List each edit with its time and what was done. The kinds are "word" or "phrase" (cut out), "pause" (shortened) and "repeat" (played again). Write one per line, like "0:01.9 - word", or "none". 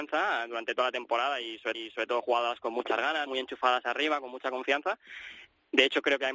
0:01.7 - repeat
0:03.3 - word